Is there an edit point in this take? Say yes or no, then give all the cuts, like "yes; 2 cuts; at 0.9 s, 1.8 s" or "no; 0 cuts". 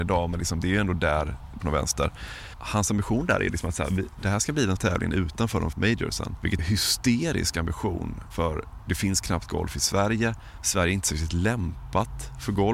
yes; 4 cuts; at 1.6 s, 4.8 s, 5.7 s, 6.6 s